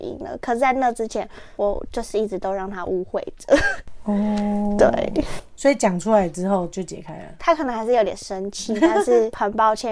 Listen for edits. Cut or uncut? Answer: uncut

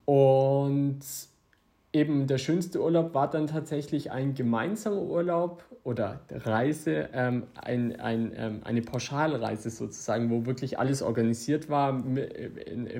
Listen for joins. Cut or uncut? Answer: uncut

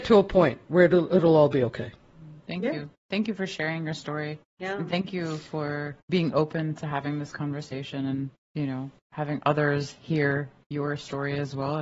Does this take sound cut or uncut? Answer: cut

